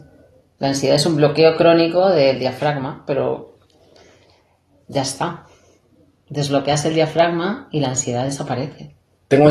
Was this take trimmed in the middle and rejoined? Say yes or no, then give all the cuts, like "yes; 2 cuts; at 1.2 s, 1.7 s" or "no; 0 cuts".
no; 0 cuts